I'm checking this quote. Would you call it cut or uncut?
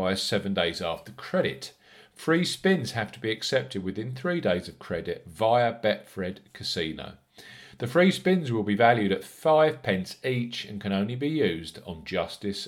uncut